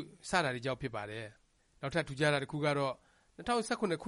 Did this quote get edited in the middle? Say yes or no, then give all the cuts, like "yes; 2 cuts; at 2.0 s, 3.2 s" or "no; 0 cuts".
no; 0 cuts